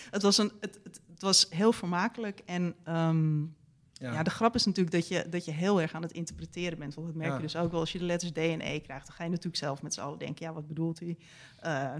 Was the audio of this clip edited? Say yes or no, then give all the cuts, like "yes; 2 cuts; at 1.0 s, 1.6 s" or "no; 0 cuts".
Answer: no; 0 cuts